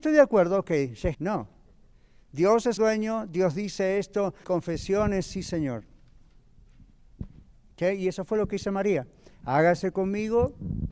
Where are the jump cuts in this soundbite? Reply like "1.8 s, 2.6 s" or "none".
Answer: 1.1 s, 2.8 s, 4.4 s